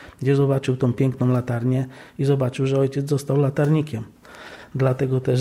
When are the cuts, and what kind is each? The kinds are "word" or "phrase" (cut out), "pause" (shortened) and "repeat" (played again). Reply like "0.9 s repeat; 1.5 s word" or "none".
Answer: none